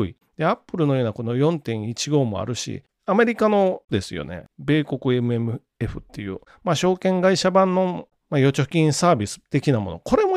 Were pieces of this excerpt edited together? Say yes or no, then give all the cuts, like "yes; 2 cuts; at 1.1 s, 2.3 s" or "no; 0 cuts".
yes; 1 cut; at 3.9 s